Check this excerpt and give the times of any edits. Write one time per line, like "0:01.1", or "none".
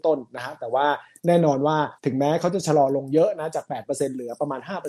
0:02.0

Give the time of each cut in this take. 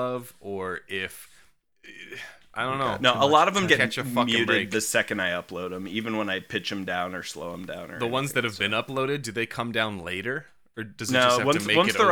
0:03.7

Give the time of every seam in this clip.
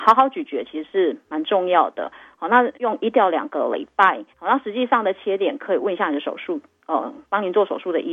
0:02.8
0:04.3

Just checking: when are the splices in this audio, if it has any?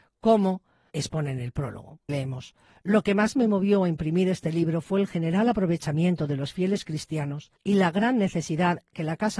0:00.9
0:02.1
0:07.6

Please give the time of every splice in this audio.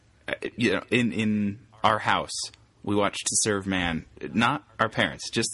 none

